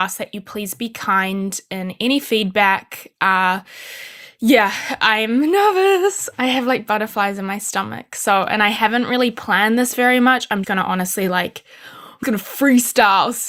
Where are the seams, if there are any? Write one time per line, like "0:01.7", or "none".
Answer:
0:10.6
0:12.2